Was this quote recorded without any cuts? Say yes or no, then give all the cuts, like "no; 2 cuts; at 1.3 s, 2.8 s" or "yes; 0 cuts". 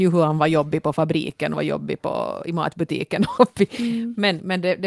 no; 2 cuts; at 1.5 s, 3.4 s